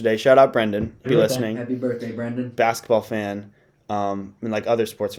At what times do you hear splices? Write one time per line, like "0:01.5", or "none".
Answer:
0:01.0
0:02.6